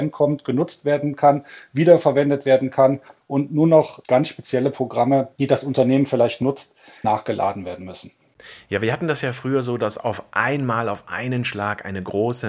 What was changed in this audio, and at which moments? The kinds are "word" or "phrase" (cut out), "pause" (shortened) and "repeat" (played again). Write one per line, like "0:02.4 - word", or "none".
0:07.0 - word